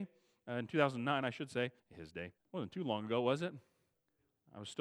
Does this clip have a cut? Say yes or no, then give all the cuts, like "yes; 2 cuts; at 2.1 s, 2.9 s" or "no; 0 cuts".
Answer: yes; 2 cuts; at 1.8 s, 2.4 s